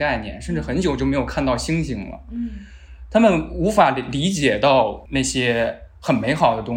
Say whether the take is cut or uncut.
uncut